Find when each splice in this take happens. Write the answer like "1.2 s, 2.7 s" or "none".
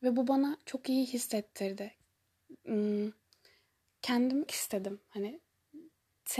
4.5 s